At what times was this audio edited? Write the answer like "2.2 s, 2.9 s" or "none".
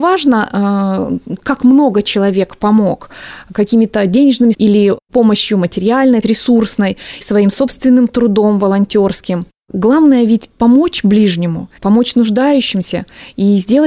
4.5 s, 6.2 s, 7.2 s, 11.8 s